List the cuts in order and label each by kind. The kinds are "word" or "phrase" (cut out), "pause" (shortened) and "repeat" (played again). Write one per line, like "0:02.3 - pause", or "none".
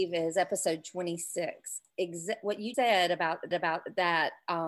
0:02.7 - word
0:03.5 - repeat